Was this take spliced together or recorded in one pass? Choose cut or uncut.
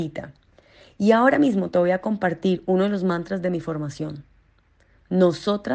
uncut